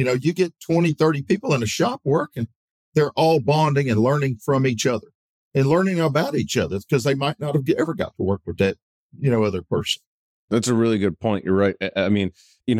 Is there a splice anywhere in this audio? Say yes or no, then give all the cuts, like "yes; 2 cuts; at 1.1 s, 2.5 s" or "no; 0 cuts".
no; 0 cuts